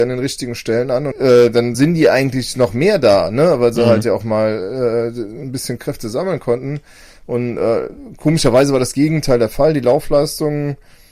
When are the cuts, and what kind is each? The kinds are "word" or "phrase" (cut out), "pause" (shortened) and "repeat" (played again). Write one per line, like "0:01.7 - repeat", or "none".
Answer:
0:01.1 - word
0:01.7 - word
0:05.8 - word